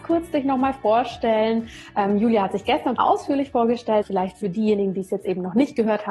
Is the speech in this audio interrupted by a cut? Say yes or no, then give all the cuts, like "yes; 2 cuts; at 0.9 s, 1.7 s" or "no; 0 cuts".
yes; 2 cuts; at 3.0 s, 4.0 s